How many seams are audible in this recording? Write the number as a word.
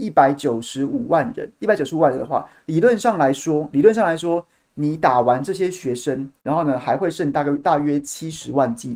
one